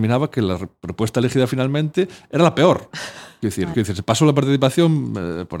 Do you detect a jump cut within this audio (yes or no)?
yes